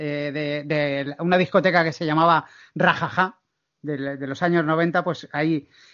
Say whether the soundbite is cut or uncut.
uncut